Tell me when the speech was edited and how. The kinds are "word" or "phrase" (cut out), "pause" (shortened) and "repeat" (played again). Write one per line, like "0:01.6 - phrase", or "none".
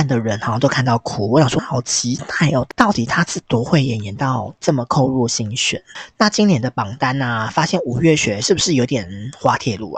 0:01.6 - word